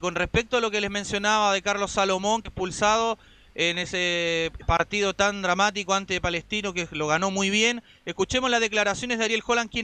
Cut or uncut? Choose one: uncut